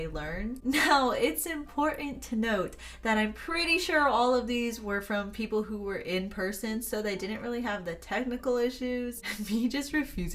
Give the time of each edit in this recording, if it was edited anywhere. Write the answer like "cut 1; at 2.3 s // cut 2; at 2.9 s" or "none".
none